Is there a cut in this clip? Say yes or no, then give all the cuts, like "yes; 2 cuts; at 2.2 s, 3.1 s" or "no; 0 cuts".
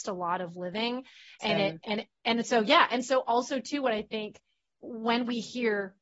no; 0 cuts